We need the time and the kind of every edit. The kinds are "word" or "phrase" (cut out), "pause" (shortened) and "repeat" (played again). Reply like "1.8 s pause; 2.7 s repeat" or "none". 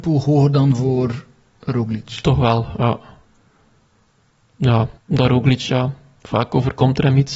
5.0 s pause

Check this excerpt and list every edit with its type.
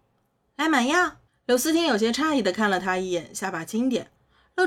1.3 s pause

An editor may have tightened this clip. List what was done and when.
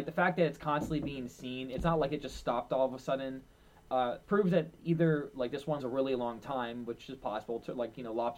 4.2 s word; 5.8 s word

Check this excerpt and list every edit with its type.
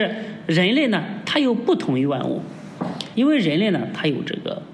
3.1 s word

